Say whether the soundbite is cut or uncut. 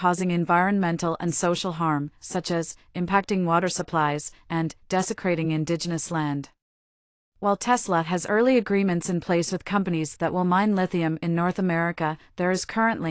uncut